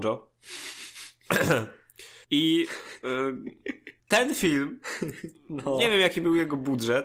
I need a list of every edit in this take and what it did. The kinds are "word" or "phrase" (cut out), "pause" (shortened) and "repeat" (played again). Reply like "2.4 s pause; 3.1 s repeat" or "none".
2.2 s pause; 4.0 s pause